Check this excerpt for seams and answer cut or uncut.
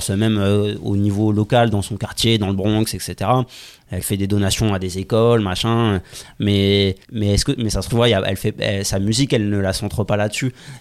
cut